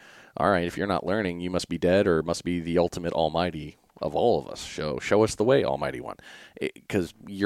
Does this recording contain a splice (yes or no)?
no